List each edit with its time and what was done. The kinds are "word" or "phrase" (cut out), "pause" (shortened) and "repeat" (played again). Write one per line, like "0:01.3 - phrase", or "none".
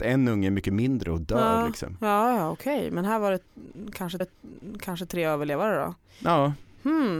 0:04.2 - repeat